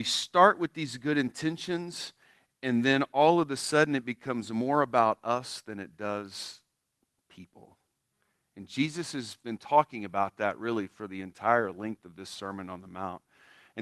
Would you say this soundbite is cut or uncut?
uncut